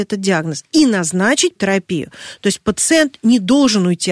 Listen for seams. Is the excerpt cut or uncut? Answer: cut